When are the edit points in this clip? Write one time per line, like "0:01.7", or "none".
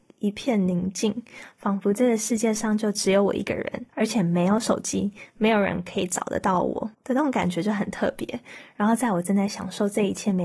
0:03.9
0:06.9